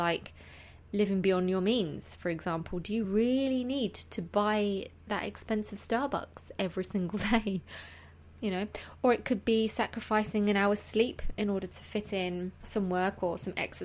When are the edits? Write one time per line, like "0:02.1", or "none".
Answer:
none